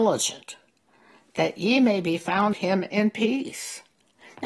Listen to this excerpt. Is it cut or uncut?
cut